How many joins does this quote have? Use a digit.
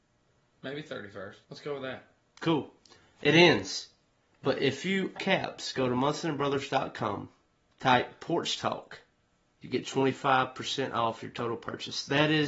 3